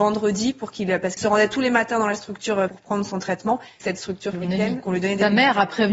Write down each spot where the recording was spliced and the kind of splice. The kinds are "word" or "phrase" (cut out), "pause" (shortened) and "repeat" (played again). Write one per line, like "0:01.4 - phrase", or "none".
0:01.2 - word
0:02.7 - word
0:03.8 - word
0:04.3 - word
0:04.8 - word

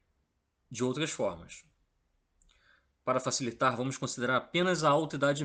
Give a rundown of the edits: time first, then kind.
none

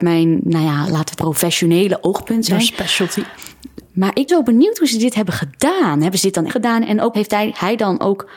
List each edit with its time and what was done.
0:01.2 - word
0:04.3 - word
0:06.5 - phrase
0:07.1 - phrase

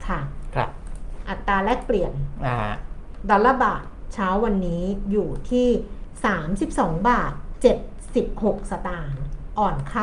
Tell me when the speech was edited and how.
none

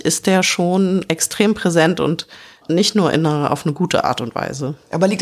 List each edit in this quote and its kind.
none

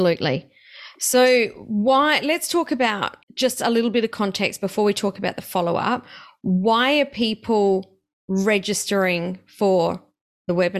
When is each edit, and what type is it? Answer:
0:03.2 - pause

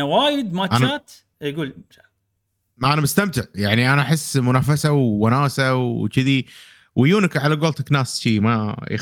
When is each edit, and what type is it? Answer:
none

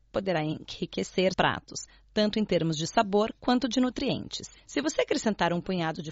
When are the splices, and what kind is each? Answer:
0:01.3 - word

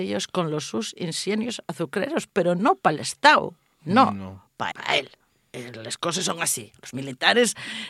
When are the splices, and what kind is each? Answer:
0:04.7 - word

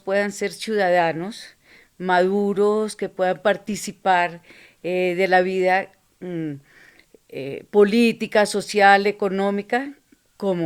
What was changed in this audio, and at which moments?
none

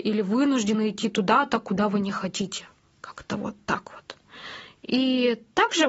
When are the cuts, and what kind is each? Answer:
none

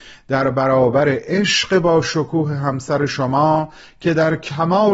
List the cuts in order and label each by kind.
none

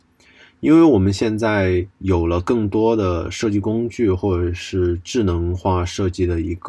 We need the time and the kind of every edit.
0:01.9 - pause

